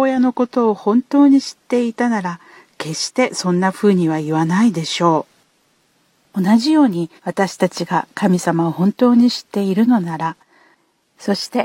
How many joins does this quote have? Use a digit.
1